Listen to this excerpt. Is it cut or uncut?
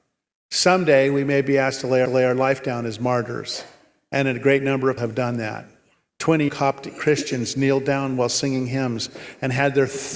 cut